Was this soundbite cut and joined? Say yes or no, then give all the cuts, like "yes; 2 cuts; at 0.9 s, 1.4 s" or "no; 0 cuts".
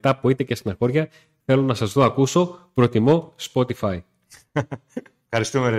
no; 0 cuts